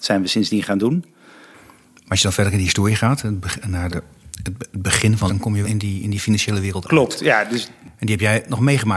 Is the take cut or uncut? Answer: cut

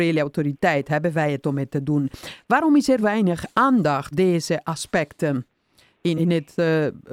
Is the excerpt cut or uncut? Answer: cut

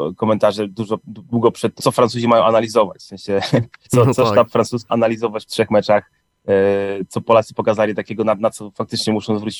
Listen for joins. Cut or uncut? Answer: cut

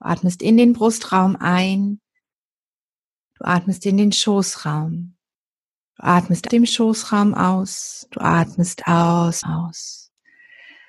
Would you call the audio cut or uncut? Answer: cut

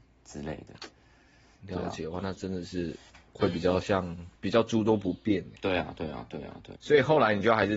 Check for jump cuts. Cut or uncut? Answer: cut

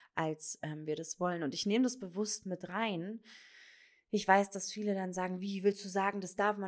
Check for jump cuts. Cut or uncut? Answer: uncut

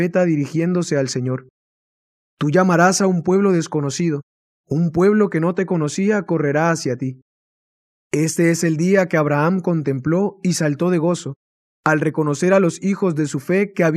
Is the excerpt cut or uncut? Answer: uncut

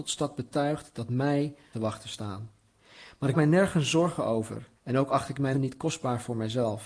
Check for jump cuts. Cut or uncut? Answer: cut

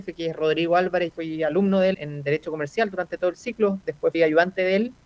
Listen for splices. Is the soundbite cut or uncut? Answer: cut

